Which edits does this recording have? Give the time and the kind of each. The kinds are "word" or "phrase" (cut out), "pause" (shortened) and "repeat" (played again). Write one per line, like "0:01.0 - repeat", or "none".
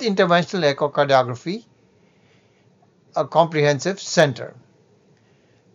0:03.1 - word